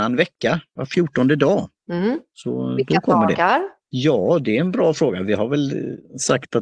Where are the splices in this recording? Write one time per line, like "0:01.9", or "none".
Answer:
none